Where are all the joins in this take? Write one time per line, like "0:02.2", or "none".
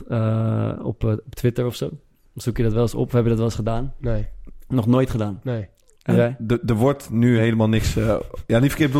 none